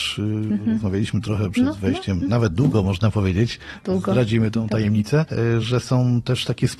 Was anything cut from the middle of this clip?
no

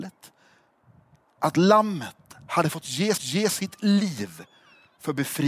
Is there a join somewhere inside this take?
yes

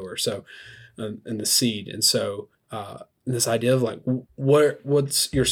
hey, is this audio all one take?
no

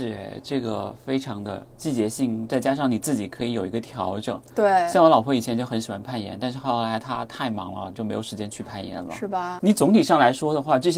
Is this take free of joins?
yes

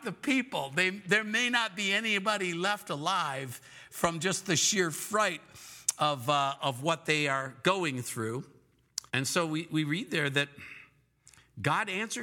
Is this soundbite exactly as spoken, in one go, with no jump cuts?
no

